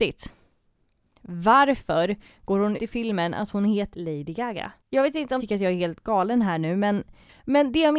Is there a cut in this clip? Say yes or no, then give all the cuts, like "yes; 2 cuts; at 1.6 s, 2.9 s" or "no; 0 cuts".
yes; 4 cuts; at 2.8 s, 3.9 s, 4.8 s, 5.4 s